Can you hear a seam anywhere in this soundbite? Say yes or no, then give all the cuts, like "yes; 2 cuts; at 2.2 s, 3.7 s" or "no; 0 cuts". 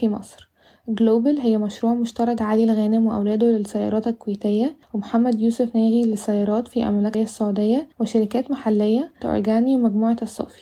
yes; 5 cuts; at 2.4 s, 4.8 s, 7.1 s, 7.9 s, 9.2 s